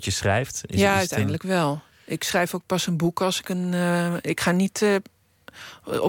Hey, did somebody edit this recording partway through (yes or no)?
no